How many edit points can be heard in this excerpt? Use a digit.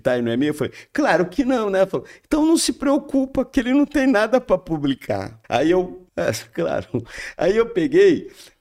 2